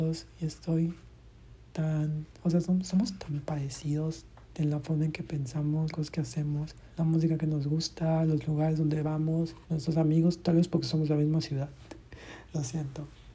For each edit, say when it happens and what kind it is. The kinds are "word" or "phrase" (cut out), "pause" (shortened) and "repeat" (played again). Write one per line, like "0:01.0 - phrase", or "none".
0:05.9 - word
0:06.9 - pause
0:09.6 - pause